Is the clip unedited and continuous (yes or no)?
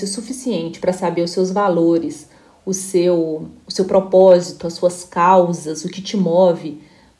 yes